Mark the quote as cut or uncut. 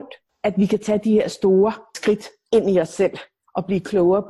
uncut